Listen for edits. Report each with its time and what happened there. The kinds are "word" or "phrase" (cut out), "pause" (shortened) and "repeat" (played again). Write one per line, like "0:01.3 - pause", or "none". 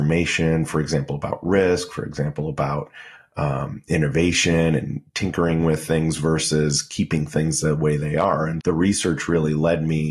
0:08.6 - word